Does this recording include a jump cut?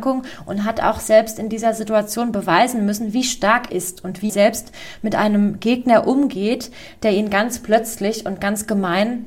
yes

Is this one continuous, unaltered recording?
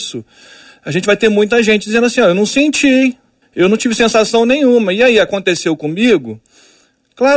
no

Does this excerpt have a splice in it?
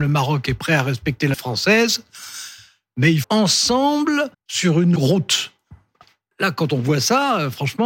yes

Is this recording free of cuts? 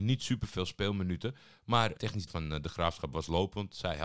no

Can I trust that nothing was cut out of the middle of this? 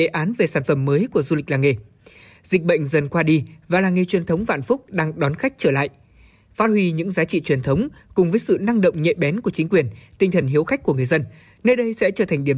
yes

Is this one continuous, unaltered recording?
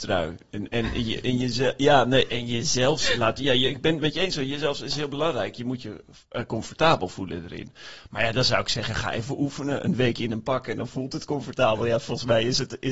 yes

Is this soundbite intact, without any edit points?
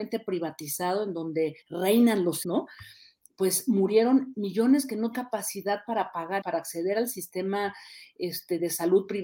no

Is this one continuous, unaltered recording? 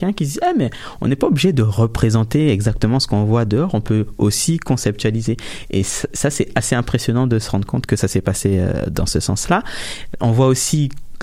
yes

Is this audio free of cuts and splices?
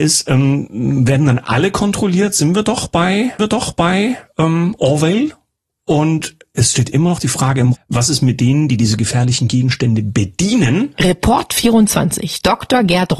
no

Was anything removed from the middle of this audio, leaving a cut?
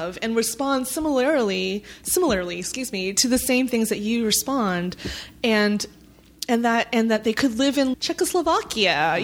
yes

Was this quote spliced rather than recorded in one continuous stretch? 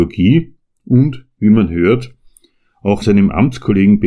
yes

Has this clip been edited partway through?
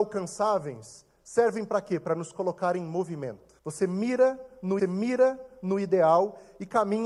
yes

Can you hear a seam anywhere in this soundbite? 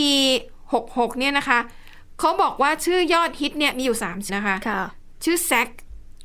yes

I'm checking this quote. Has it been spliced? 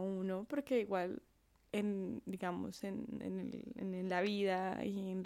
no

